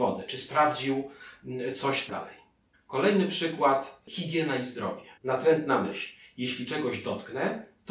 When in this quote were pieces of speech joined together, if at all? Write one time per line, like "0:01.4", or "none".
0:02.1
0:02.7
0:05.2